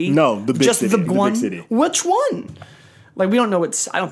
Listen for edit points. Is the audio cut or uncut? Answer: cut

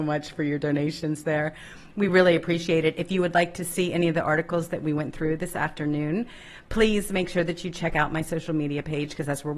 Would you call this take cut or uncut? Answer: uncut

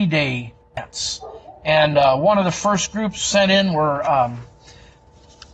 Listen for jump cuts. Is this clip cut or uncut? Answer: uncut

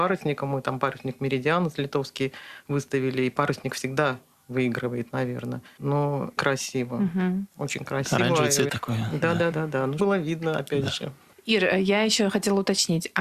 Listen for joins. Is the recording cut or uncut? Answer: cut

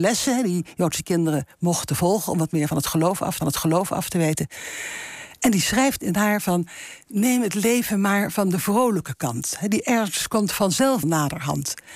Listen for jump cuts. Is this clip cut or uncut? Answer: cut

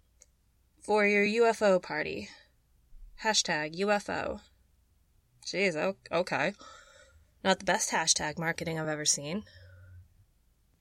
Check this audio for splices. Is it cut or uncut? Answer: uncut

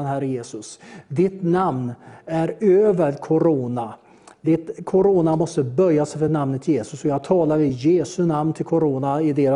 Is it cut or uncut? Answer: uncut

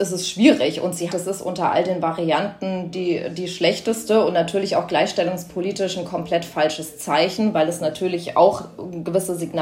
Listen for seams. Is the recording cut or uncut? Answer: cut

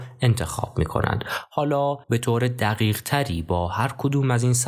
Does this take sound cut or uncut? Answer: cut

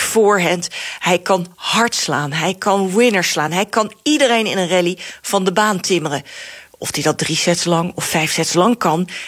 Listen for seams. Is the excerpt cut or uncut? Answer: uncut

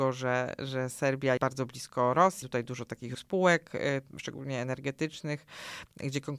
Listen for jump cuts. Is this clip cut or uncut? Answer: cut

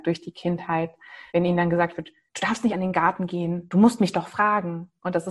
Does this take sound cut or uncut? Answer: cut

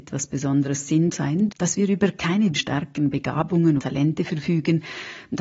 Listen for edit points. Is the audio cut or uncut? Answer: cut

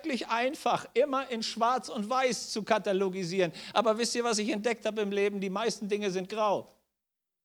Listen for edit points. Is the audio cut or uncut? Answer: uncut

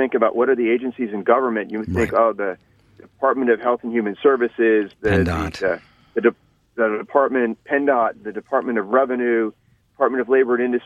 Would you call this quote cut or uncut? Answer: uncut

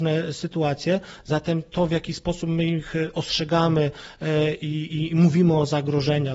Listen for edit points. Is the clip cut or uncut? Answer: uncut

